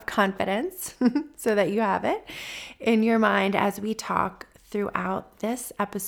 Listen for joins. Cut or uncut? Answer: uncut